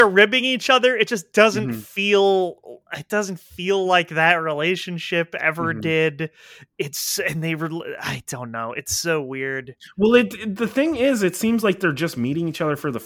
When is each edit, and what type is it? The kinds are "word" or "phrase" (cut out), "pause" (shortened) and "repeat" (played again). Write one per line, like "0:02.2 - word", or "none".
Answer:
none